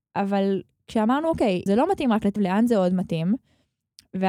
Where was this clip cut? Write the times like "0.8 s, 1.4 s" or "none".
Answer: 1.7 s, 2.4 s